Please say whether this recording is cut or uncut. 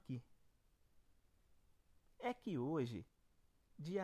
uncut